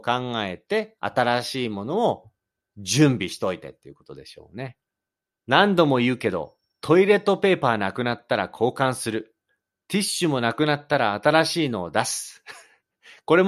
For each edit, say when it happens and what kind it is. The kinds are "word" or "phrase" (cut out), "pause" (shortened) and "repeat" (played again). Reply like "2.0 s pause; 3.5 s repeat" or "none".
1.0 s pause; 5.1 s pause